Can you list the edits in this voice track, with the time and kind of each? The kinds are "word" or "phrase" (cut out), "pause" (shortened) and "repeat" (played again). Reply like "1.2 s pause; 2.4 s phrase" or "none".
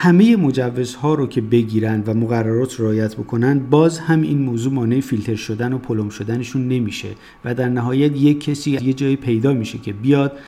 8.8 s word